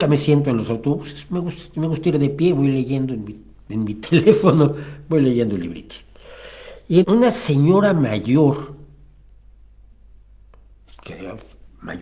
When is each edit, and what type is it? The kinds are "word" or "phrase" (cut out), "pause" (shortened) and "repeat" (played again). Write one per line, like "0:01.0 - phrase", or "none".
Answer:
0:07.0 - word